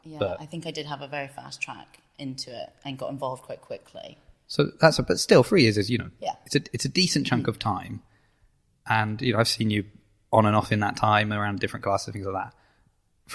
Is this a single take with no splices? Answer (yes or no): yes